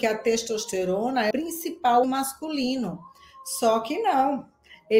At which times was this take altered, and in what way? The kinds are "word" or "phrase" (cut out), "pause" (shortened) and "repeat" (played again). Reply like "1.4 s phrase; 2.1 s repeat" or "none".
1.3 s word; 2.0 s word